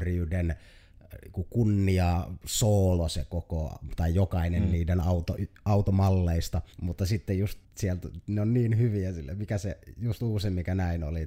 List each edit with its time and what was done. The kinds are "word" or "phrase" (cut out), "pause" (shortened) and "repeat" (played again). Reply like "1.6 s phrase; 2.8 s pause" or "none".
6.7 s pause; 7.6 s pause